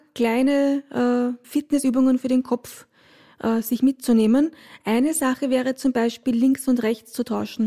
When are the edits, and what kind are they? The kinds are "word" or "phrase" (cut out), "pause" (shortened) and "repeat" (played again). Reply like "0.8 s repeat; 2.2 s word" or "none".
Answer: 1.4 s word